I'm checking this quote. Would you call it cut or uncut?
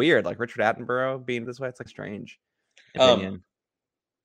cut